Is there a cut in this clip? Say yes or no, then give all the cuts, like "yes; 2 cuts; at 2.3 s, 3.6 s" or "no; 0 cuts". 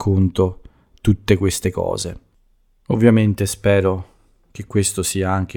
no; 0 cuts